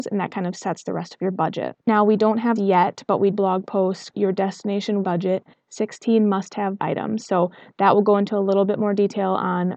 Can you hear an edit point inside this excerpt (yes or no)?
yes